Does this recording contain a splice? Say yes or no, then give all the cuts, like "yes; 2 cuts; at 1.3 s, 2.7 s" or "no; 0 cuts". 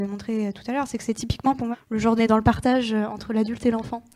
yes; 2 cuts; at 1.7 s, 2.2 s